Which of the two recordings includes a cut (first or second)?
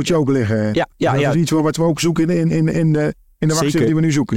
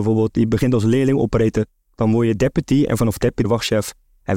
second